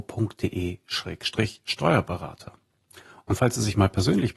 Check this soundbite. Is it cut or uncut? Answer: uncut